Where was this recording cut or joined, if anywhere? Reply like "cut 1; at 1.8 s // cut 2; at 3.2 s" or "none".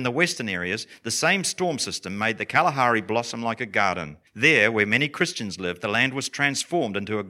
cut 1; at 4.3 s